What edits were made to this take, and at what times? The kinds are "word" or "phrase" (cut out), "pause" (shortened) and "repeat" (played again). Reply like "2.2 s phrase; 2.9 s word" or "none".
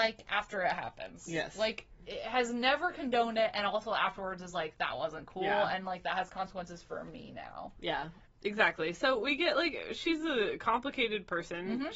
8.3 s pause